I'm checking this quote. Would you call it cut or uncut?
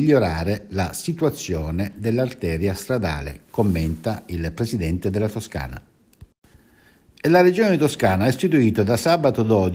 uncut